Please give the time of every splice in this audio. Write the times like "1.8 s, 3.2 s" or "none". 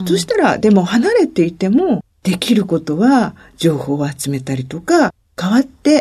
none